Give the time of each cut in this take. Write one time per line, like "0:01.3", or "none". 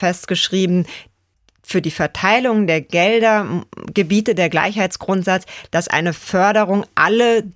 none